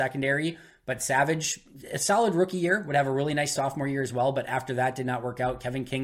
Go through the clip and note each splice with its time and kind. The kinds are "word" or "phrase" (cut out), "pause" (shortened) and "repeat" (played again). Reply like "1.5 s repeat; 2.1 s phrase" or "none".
none